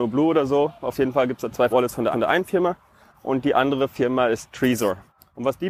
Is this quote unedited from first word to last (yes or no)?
no